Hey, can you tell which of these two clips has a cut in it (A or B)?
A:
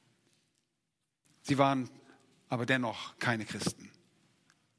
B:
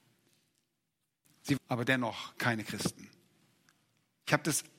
B